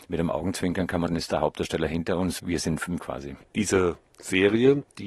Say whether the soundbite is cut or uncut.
cut